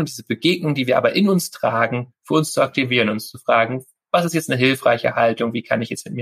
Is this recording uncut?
yes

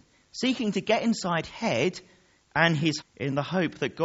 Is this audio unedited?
no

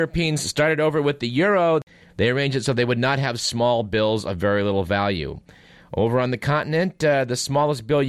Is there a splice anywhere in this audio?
no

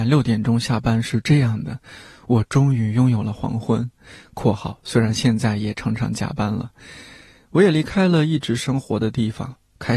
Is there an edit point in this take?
no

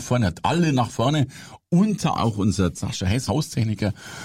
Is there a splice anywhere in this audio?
yes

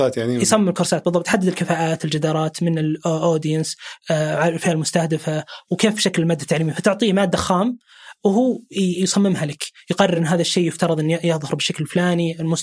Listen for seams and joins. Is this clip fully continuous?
yes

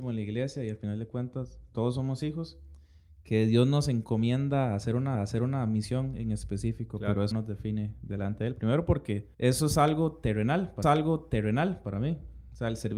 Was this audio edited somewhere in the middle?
yes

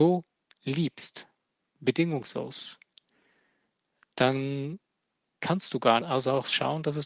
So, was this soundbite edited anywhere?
yes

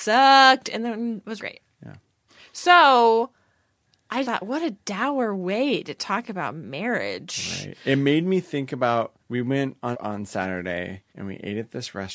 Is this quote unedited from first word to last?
no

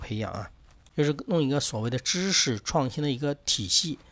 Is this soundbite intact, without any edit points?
yes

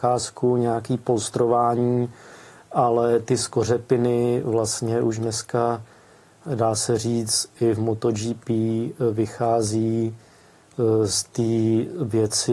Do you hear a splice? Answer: no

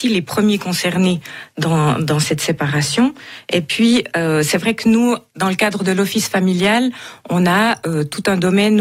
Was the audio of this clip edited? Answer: no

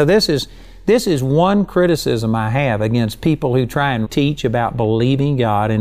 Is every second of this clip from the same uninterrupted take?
no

